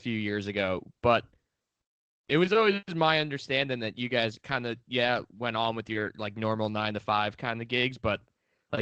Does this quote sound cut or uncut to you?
uncut